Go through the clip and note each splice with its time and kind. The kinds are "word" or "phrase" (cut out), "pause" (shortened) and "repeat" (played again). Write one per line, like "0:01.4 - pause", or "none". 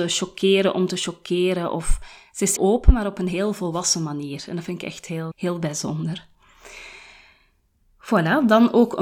0:02.6 - word
0:05.3 - word